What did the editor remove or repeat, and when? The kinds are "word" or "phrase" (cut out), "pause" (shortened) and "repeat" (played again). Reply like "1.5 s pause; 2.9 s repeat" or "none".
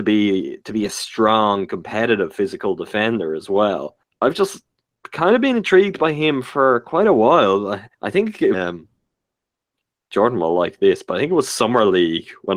4.0 s pause; 7.9 s pause; 8.5 s phrase